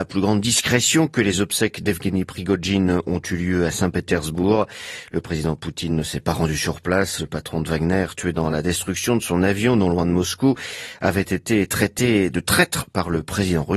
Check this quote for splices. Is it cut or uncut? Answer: uncut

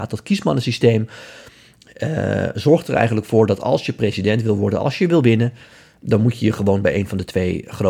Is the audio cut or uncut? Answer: uncut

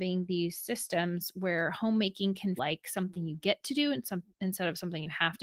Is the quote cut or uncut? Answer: cut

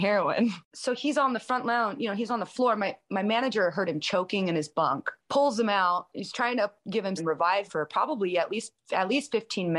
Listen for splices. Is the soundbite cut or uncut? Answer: cut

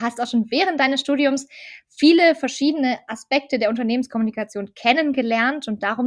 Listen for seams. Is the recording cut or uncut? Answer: uncut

